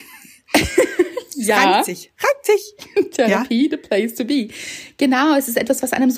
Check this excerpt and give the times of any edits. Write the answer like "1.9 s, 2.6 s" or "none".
none

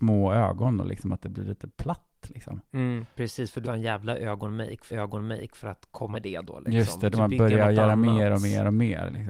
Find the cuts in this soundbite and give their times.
1.7 s, 3.6 s, 4.9 s, 6.1 s, 7.1 s

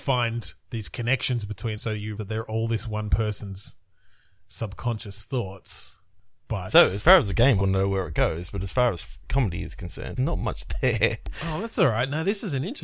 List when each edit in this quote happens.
1.8 s, 2.2 s, 7.6 s, 10.1 s

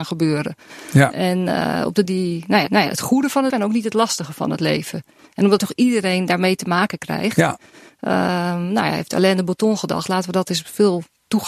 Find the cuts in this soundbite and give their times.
2.0 s, 2.7 s, 3.5 s, 5.6 s

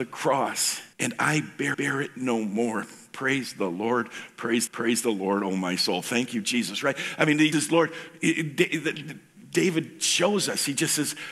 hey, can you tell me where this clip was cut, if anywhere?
0.9 s, 1.7 s, 4.7 s, 7.5 s

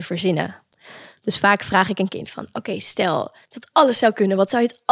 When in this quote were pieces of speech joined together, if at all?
3.4 s

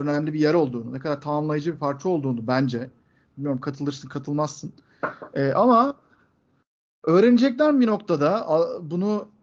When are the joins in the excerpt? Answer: none

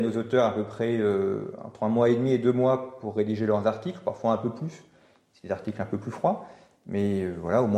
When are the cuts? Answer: none

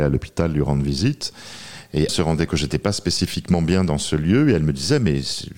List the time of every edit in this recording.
2.1 s, 2.5 s

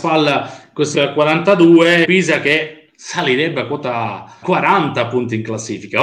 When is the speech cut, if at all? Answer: 0.9 s, 2.0 s, 4.4 s

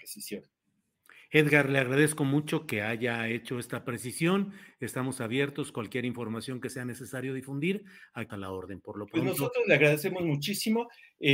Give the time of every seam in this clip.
8.3 s

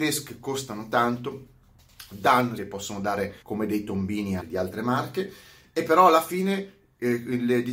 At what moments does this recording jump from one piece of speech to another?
2.6 s, 3.4 s, 4.4 s

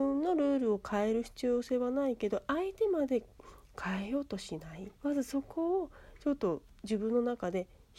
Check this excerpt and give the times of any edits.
5.0 s

